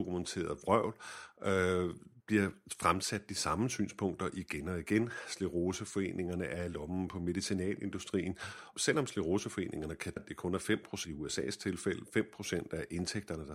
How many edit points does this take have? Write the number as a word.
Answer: four